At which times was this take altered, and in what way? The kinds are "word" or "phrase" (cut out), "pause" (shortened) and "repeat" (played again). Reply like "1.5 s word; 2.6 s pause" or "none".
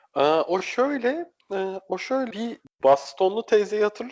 2.3 s word; 2.6 s pause

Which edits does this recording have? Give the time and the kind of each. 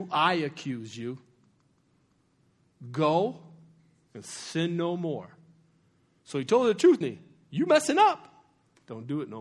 7.0 s word

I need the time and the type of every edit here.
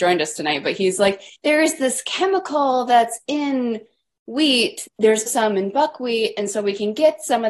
1.3 s pause; 4.9 s word; 5.3 s word

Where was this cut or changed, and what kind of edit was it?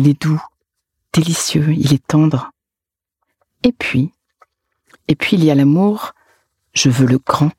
none

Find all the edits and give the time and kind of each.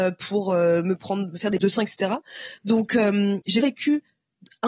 1.6 s word; 3.6 s word

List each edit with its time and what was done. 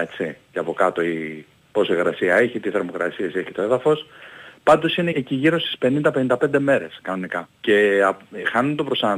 5.1 s word; 7.5 s pause

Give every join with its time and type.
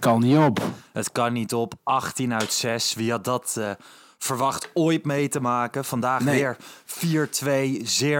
none

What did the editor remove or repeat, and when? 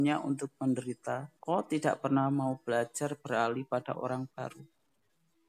1.4 s pause

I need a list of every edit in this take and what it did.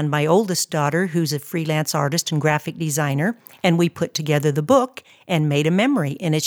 none

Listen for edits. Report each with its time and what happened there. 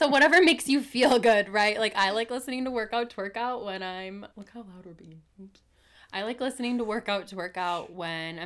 4.3 s pause

